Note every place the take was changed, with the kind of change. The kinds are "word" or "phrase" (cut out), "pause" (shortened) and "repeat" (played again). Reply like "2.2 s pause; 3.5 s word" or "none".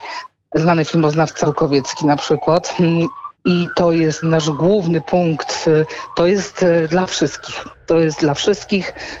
1.4 s word; 3.3 s pause; 4.2 s word